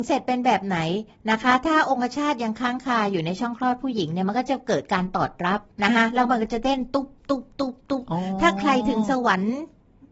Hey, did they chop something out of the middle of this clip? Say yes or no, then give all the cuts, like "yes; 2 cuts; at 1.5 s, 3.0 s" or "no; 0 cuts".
yes; 1 cut; at 5.7 s